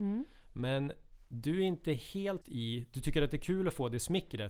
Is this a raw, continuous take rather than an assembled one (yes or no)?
no